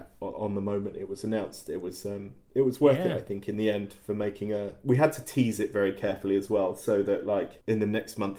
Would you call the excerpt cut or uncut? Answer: uncut